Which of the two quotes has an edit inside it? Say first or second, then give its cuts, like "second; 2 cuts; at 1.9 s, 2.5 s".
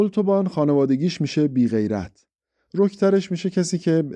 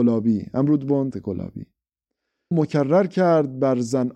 second; 2 cuts; at 1.1 s, 2.5 s